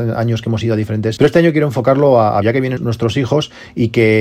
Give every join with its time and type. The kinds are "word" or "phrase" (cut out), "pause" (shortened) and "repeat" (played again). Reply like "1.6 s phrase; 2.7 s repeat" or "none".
1.2 s word; 2.4 s word; 2.8 s word